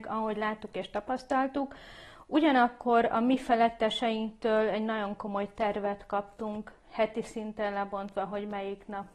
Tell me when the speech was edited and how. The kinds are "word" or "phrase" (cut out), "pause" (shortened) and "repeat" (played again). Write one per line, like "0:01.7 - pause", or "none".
0:06.8 - pause